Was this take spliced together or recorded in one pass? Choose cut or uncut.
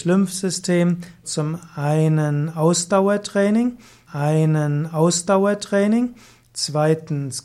cut